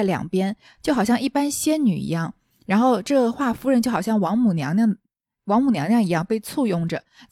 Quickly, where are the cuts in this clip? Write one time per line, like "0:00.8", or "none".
none